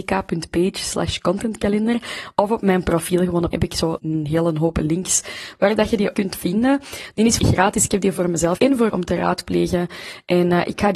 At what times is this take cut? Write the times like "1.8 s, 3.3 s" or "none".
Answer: 3.5 s, 4.0 s, 6.1 s, 7.4 s, 8.6 s, 8.9 s